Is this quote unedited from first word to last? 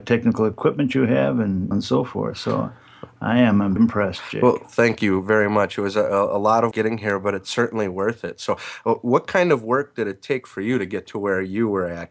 no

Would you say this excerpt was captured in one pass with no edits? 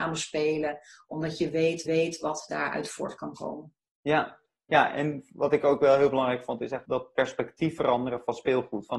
no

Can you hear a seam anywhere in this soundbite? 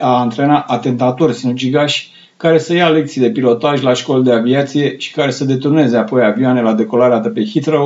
no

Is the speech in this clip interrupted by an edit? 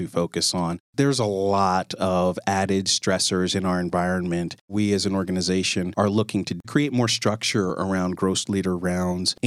no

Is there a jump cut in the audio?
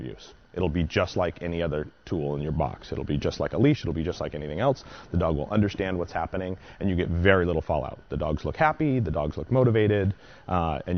no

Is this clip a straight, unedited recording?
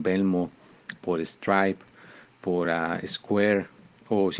yes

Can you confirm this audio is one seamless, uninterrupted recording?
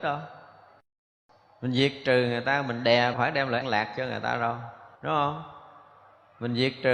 no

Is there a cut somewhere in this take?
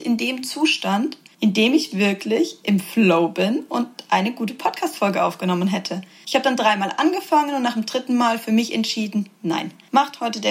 no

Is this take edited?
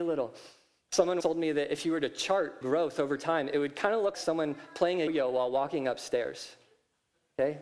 yes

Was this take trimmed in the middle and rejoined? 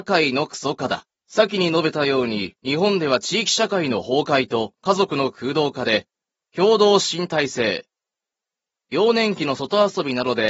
yes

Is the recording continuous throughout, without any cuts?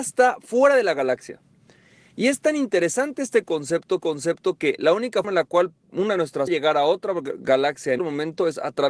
no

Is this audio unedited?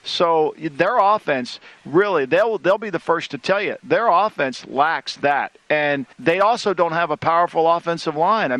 no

